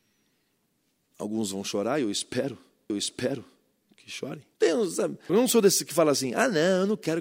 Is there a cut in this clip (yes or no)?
yes